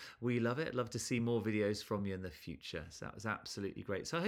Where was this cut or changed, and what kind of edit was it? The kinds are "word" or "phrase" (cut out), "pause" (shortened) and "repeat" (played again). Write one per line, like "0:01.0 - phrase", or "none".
none